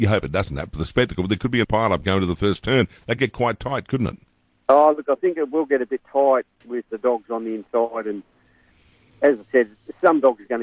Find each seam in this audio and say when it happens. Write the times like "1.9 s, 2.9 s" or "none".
1.6 s, 3.2 s, 6.9 s